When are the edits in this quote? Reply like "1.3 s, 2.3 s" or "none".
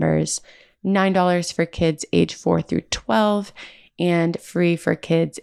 none